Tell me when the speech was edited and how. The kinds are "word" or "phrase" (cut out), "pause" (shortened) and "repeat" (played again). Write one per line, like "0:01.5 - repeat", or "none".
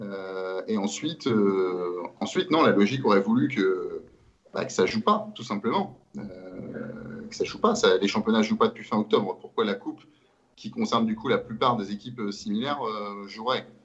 none

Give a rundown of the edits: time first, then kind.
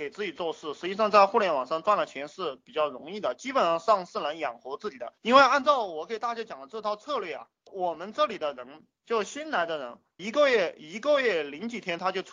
0:05.2 - pause
0:07.7 - word
0:10.2 - word

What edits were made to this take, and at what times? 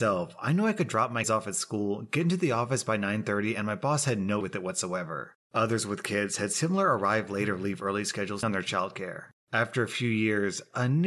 0:01.2 - word
0:04.4 - word
0:08.4 - word

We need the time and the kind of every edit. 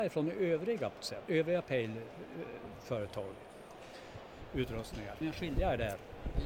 0:01.0 - word
0:05.2 - word

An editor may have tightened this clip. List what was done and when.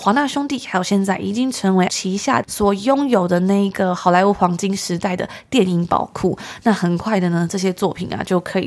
0:01.9 - word
0:02.4 - word

